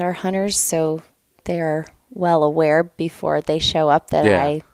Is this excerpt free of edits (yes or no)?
yes